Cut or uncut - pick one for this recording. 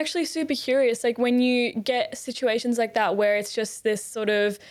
uncut